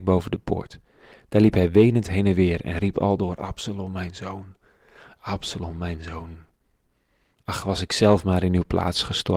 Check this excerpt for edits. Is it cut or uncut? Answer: uncut